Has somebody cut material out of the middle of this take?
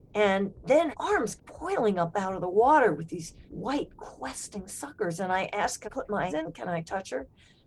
yes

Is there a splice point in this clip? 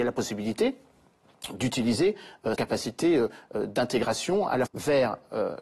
yes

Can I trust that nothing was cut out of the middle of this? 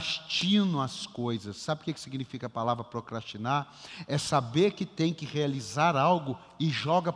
yes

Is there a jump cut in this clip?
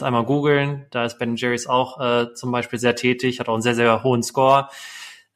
no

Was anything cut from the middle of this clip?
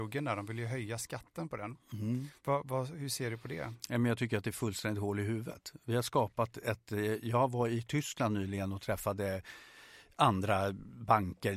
yes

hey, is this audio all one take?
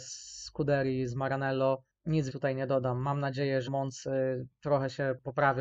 no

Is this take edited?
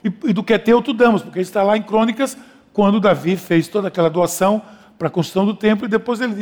no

